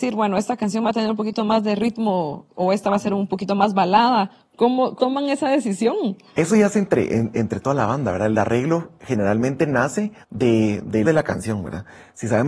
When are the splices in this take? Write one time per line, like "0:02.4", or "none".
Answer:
0:05.0
0:10.2
0:11.0